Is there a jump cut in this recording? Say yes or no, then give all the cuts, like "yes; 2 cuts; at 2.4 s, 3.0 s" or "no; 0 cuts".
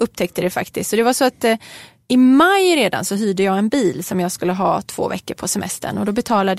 no; 0 cuts